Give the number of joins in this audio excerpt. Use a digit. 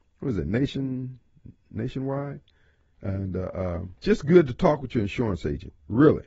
1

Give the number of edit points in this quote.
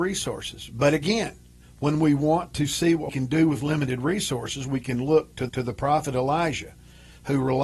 3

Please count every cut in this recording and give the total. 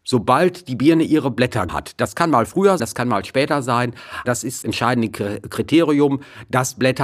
4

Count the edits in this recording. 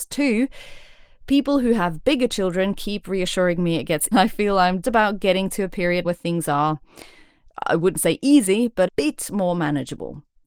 4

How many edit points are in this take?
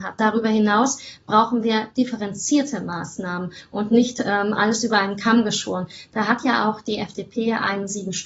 0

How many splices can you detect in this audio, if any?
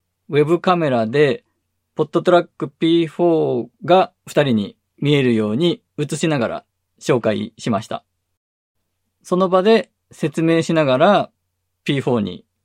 2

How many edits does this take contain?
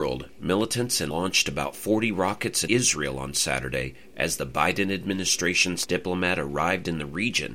3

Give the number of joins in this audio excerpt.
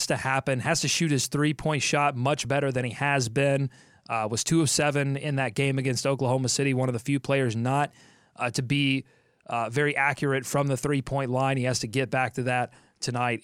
0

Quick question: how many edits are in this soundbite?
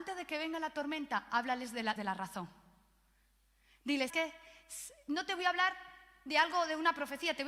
2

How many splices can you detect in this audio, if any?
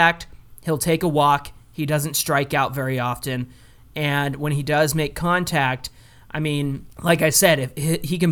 0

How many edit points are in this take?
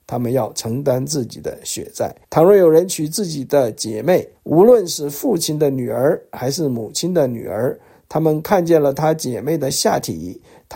2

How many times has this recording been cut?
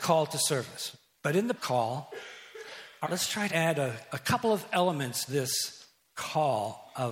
4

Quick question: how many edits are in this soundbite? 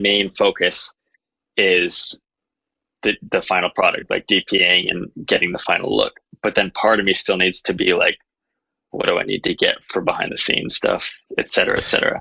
0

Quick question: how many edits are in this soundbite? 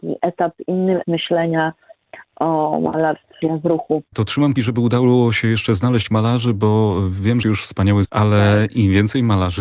5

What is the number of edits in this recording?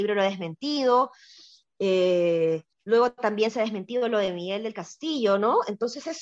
1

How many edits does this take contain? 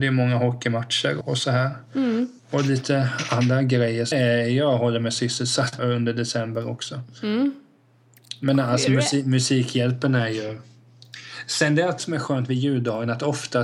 5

